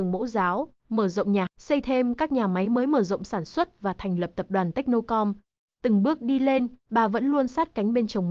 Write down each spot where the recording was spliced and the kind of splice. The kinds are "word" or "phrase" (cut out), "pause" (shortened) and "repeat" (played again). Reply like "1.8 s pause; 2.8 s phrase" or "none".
1.5 s word